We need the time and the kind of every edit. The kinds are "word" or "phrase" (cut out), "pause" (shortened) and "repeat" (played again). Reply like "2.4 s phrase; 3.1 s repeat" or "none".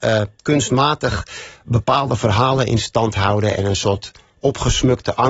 none